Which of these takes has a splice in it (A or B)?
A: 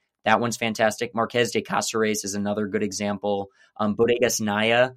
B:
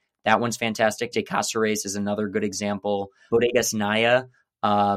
B